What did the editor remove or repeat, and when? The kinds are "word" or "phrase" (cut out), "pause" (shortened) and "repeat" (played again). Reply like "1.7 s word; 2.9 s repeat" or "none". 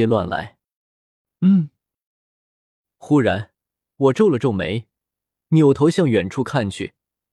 none